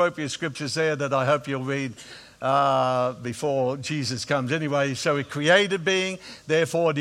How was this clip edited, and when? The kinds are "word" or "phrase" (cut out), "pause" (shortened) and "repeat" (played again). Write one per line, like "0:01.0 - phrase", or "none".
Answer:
none